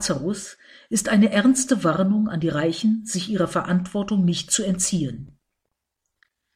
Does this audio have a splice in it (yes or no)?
no